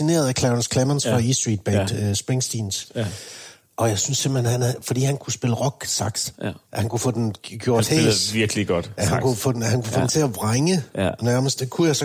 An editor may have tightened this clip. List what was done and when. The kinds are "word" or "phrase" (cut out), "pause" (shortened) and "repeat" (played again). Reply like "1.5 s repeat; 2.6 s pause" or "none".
6.6 s pause